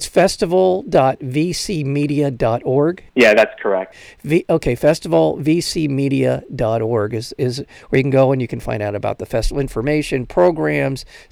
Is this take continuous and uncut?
no; 1 cut; at 3.1 s

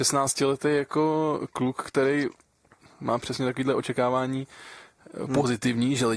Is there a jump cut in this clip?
no; 0 cuts

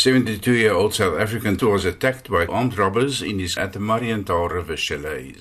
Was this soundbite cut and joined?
yes; 3 cuts; at 1.6 s, 2.5 s, 3.6 s

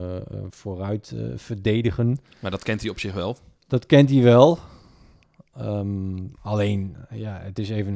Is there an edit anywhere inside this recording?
no; 0 cuts

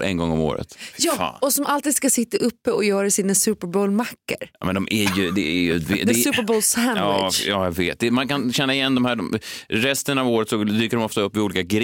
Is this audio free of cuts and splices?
yes; 0 cuts

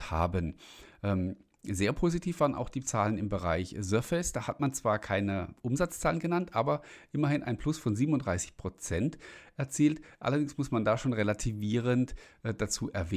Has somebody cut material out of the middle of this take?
no; 0 cuts

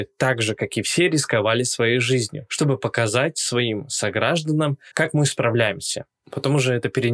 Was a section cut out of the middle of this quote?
yes; 1 cut; at 4.9 s

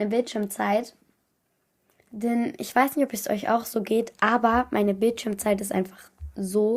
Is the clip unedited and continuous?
yes; 0 cuts

